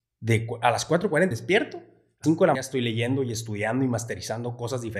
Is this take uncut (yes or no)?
no